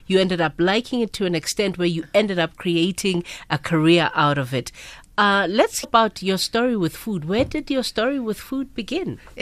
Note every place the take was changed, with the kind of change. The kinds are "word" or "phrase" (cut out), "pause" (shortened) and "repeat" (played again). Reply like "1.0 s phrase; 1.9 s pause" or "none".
5.8 s word